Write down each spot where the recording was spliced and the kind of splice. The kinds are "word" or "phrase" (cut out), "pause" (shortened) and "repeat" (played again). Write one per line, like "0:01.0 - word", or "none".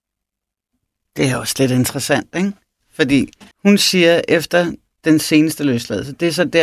0:03.5 - pause